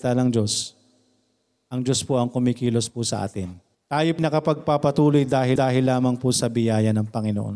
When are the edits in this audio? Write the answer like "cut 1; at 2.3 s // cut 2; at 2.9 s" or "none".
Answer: cut 1; at 3.7 s // cut 2; at 4.2 s // cut 3; at 5.6 s

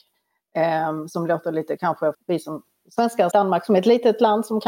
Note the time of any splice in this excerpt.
cut 1; at 1.8 s // cut 2; at 2.1 s // cut 3; at 3.3 s

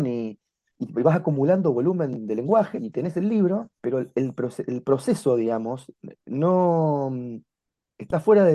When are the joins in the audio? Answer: cut 1; at 2.8 s // cut 2; at 3.8 s

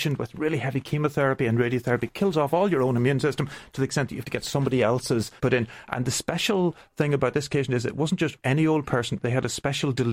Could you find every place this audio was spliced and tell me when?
cut 1; at 5.4 s

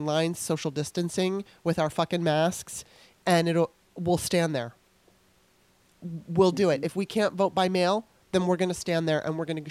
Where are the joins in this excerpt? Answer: none

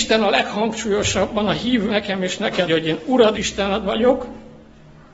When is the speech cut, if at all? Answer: cut 1; at 1.9 s // cut 2; at 2.7 s // cut 3; at 3.3 s

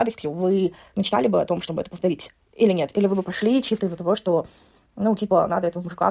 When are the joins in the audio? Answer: none

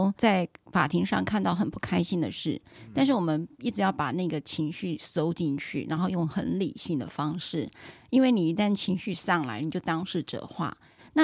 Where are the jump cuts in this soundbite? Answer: none

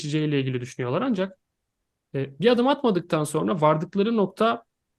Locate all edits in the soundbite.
none

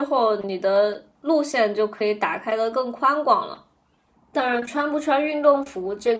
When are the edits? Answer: cut 1; at 4.1 s

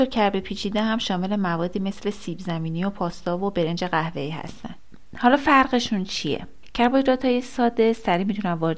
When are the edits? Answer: none

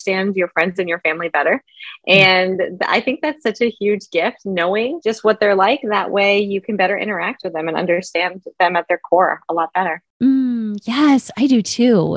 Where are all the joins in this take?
none

